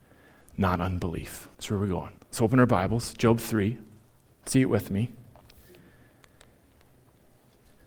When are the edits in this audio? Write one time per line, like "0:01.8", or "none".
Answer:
0:01.5
0:02.2
0:04.3